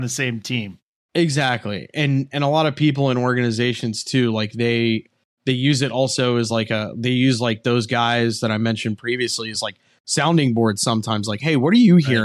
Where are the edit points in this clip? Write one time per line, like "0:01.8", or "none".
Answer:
none